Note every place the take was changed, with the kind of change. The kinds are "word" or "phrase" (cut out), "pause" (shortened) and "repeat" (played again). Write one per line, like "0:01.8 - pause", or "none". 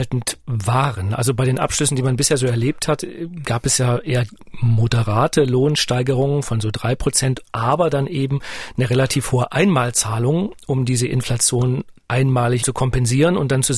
0:12.6 - word